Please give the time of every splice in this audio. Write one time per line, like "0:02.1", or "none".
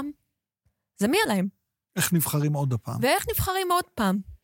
0:01.3